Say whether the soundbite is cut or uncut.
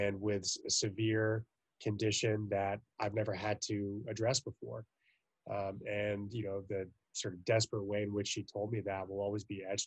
uncut